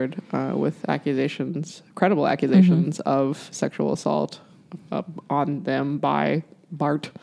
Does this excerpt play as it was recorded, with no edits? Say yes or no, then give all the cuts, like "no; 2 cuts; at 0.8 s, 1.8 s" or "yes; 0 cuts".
yes; 0 cuts